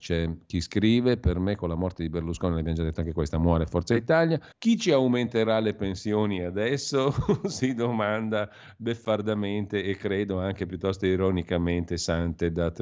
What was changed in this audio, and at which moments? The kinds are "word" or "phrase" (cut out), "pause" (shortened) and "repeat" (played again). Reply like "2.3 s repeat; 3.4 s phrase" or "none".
4.5 s pause